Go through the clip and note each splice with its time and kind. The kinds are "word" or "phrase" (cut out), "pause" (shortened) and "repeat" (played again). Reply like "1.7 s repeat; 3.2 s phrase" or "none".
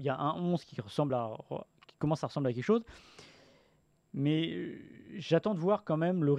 none